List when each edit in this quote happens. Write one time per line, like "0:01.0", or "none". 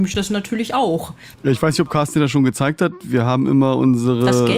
0:01.3